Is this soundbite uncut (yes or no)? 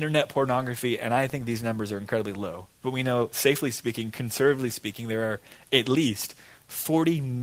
yes